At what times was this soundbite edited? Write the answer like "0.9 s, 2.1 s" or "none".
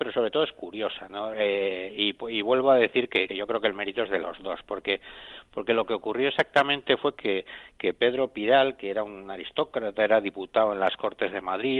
3.3 s